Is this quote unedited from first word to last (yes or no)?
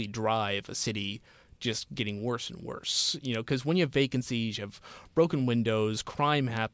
yes